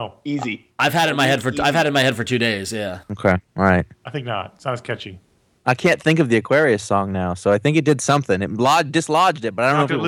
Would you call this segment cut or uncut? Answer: cut